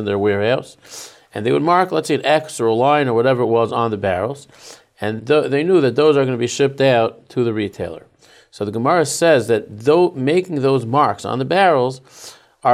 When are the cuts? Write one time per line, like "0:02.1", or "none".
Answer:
0:05.2